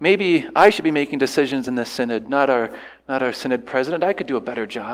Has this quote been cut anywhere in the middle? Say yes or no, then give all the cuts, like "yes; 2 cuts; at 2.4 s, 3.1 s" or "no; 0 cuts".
no; 0 cuts